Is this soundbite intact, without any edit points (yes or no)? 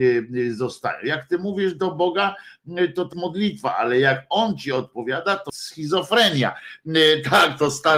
no